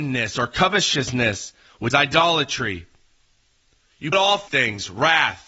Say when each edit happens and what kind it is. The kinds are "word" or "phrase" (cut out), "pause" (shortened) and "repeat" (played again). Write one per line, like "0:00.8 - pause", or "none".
0:01.9 - word
0:04.1 - word
0:04.5 - word